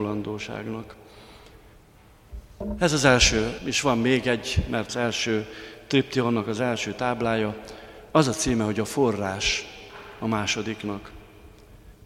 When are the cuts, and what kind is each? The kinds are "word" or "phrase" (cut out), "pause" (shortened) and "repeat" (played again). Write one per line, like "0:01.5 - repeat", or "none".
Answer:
0:03.6 - word
0:04.9 - phrase
0:08.1 - pause